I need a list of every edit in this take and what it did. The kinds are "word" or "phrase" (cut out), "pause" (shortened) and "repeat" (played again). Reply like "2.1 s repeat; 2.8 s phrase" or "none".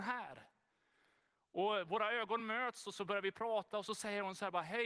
none